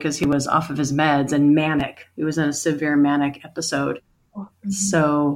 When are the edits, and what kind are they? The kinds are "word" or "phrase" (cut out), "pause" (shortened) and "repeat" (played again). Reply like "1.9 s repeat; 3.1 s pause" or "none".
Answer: none